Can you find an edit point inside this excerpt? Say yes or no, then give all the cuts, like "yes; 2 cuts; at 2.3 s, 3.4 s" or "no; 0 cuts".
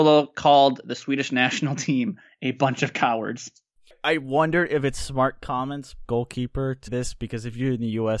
yes; 2 cuts; at 6.1 s, 6.9 s